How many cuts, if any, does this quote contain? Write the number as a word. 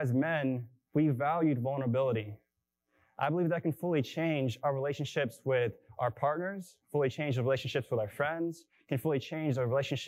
zero